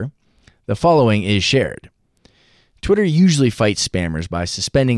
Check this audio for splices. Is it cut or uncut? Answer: uncut